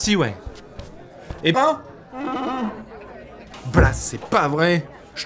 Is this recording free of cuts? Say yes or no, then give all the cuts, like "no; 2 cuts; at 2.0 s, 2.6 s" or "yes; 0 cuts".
no; 1 cut; at 1.5 s